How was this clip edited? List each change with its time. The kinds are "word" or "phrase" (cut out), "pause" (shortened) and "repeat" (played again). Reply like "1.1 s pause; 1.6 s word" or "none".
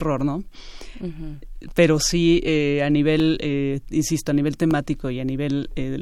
none